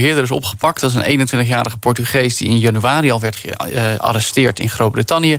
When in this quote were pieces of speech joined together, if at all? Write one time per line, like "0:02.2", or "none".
none